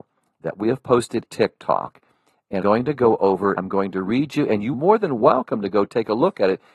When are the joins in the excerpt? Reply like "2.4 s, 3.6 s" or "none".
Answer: 1.3 s, 2.6 s, 3.6 s, 4.7 s